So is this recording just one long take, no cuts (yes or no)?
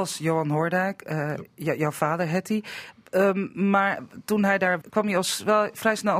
no